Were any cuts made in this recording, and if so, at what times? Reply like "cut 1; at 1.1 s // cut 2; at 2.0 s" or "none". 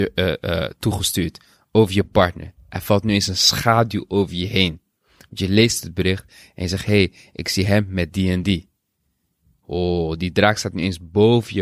none